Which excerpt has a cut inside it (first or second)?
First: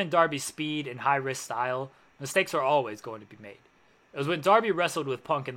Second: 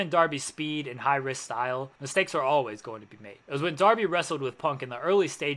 second